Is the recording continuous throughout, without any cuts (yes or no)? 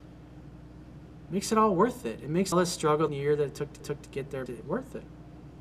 no